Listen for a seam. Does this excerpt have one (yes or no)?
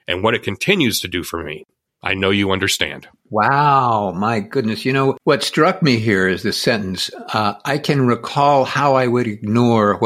no